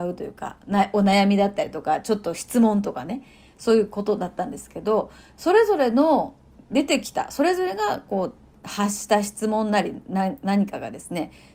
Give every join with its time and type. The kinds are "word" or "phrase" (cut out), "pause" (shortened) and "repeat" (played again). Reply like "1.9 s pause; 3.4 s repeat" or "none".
none